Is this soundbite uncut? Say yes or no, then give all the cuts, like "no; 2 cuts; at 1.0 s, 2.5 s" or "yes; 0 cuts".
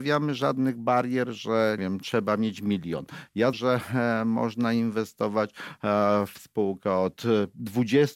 no; 2 cuts; at 1.8 s, 3.5 s